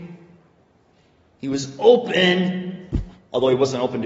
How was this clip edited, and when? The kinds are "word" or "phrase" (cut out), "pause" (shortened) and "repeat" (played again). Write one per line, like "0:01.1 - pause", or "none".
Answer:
none